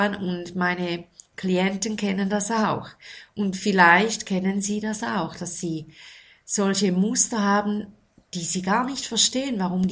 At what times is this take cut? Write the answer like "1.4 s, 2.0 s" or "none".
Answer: none

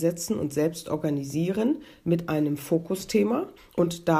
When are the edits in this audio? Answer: none

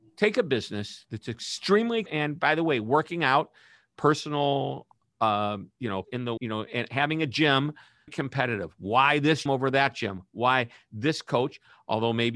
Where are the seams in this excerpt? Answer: 2.1 s, 6.0 s, 6.4 s, 8.1 s, 9.5 s

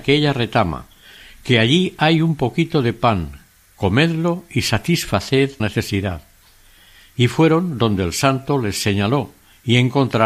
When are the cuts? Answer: 5.6 s

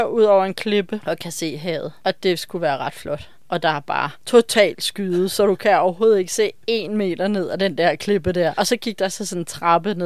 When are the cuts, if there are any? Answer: none

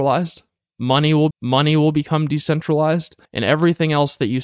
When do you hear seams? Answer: 1.3 s, 3.2 s

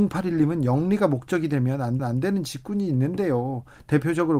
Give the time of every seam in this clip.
2.0 s

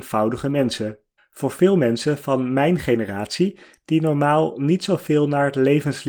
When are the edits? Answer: 1.2 s

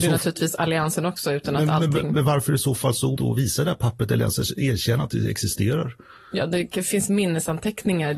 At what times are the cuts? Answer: 3.2 s

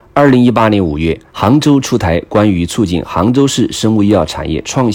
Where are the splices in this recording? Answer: 1.3 s

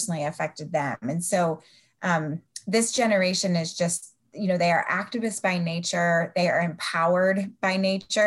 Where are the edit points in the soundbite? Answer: none

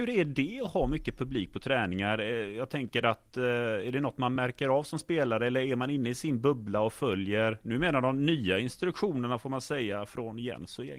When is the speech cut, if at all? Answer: none

